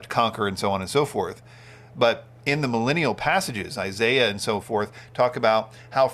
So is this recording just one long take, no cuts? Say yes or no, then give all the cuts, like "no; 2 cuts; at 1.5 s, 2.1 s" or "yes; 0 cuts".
yes; 0 cuts